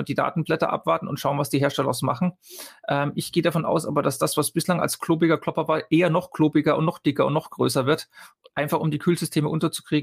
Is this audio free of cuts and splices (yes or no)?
yes